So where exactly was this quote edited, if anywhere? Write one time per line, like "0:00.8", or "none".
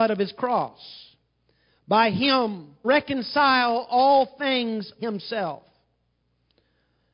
0:02.8
0:05.0